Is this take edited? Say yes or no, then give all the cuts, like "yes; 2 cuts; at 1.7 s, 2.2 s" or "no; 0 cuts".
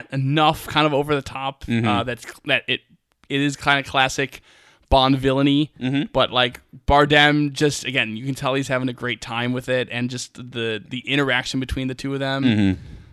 no; 0 cuts